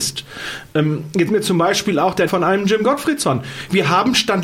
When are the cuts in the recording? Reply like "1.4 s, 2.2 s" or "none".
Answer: 1.3 s, 2.3 s